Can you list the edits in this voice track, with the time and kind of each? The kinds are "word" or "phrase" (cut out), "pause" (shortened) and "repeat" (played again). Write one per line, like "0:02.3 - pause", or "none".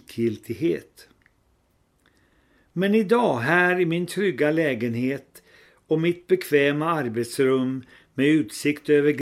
none